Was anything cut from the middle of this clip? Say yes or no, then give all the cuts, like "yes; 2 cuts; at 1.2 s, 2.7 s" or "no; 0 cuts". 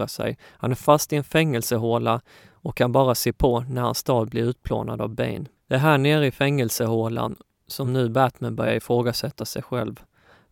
no; 0 cuts